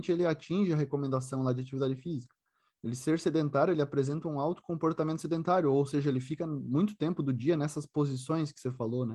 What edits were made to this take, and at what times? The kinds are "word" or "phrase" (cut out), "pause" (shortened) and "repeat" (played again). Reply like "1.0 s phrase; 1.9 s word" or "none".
none